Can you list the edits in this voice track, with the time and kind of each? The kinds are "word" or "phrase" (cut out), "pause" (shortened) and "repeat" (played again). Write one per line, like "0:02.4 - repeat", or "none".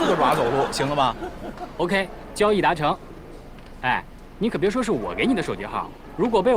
none